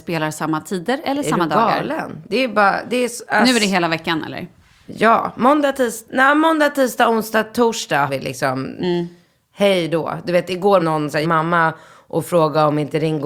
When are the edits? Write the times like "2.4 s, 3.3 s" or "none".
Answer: 8.1 s, 10.8 s, 11.2 s